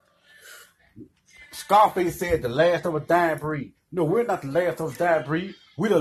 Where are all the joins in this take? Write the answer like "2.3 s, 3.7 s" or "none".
none